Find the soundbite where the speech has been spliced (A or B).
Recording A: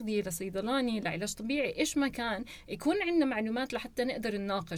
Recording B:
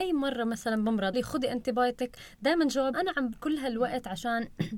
B